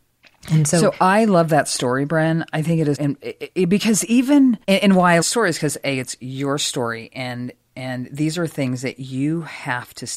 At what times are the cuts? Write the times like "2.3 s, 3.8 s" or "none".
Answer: 2.9 s, 4.6 s, 5.2 s